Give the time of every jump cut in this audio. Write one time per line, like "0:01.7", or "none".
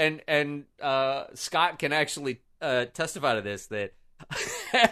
none